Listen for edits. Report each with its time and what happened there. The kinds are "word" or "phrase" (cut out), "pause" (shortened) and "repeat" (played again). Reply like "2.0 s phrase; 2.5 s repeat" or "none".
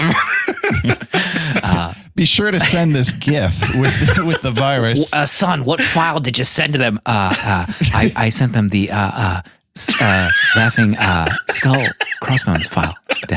none